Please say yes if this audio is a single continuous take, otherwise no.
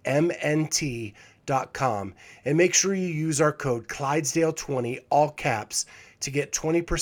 yes